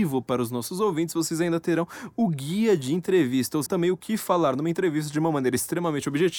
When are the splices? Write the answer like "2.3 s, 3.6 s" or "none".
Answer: 3.7 s

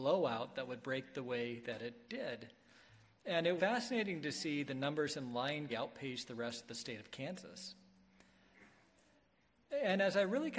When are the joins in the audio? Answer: 3.6 s, 5.7 s

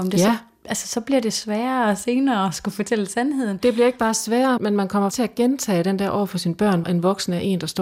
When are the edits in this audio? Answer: 4.6 s, 5.1 s, 6.8 s

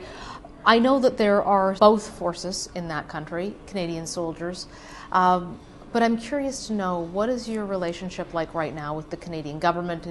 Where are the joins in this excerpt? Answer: 1.8 s

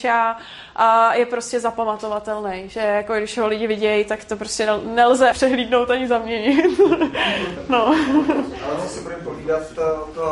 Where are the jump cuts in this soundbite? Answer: 5.3 s

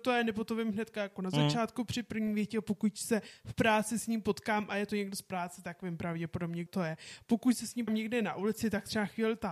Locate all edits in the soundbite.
6.7 s, 7.9 s

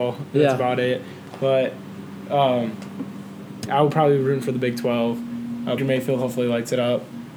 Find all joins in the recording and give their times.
3.7 s, 5.8 s

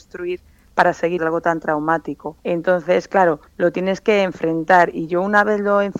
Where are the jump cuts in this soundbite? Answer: 1.2 s, 2.4 s, 3.5 s

